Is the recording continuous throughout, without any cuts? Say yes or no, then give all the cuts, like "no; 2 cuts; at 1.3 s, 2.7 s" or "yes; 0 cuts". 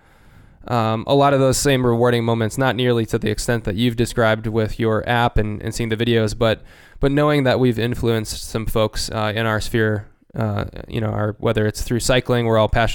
yes; 0 cuts